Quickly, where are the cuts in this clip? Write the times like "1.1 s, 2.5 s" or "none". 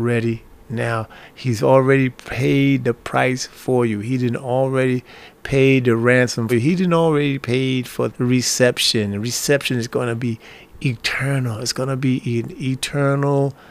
6.5 s, 8.1 s